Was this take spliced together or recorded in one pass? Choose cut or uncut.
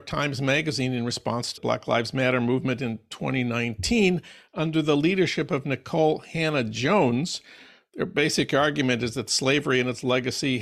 cut